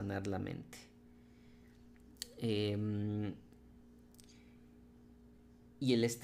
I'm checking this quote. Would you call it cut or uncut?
uncut